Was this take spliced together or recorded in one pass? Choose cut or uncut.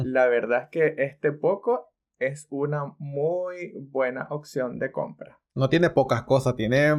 uncut